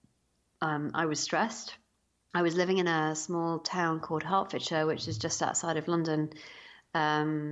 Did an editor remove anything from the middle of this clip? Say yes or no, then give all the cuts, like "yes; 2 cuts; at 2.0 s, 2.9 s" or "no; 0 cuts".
no; 0 cuts